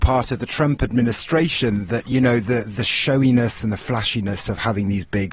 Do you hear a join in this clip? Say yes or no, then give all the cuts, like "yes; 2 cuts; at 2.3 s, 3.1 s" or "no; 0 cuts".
no; 0 cuts